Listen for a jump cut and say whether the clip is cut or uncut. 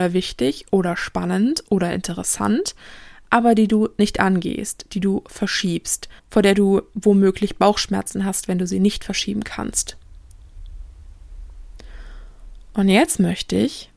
cut